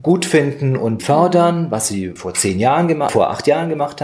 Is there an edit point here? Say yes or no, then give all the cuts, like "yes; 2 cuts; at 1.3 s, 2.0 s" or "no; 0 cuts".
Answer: yes; 3 cuts; at 1.0 s, 2.2 s, 3.1 s